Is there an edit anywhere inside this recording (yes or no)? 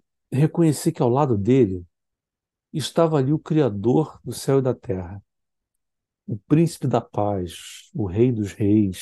no